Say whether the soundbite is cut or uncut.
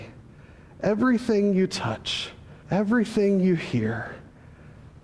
cut